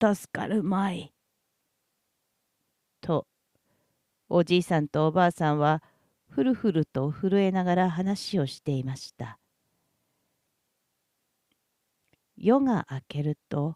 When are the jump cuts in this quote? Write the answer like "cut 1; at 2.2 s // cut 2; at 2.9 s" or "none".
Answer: none